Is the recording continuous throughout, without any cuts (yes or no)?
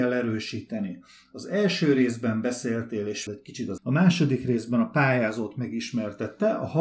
no